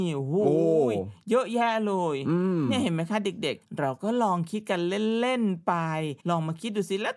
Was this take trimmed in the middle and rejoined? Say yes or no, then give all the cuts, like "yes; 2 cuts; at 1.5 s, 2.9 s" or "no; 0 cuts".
yes; 1 cut; at 6.2 s